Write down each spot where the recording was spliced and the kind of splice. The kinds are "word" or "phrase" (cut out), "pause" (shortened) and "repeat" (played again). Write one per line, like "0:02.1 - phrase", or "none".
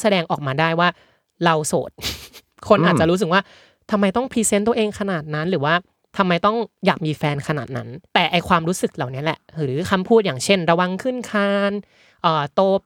0:08.1 - pause